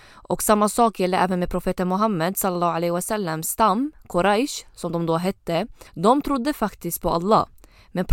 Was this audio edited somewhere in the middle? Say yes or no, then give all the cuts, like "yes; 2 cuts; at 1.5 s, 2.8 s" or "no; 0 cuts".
yes; 1 cut; at 5.9 s